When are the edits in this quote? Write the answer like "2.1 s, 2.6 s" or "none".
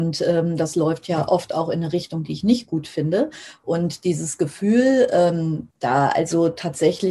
5.7 s

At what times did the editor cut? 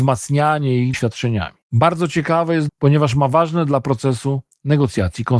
0.9 s, 1.6 s, 2.7 s

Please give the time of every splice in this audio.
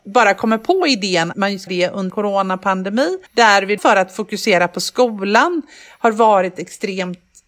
1.3 s, 1.7 s, 2.1 s, 3.3 s, 3.8 s

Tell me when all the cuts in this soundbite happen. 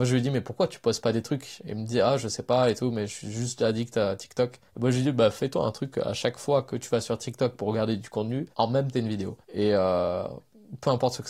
4.7 s, 8.5 s, 8.9 s, 9.4 s

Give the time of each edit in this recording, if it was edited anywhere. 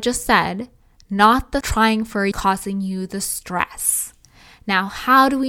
1.6 s, 2.3 s

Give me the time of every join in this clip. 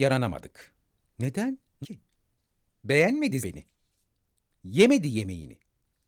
1.8 s, 3.4 s

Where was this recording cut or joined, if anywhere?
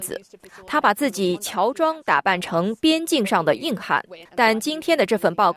4.2 s

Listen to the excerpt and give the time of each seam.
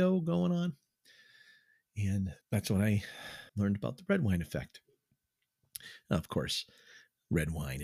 2.4 s, 3.5 s

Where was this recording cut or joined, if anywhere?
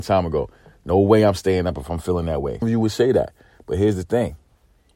2.6 s

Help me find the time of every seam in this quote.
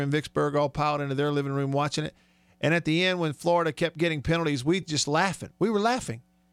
none

